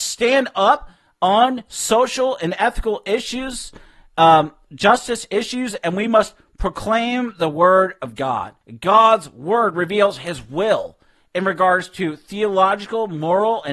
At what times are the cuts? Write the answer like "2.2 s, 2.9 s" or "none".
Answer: none